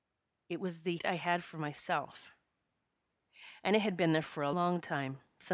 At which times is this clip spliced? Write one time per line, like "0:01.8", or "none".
0:01.0
0:04.5